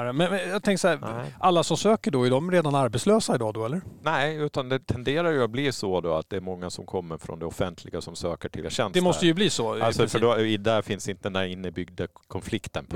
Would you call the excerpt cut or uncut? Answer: cut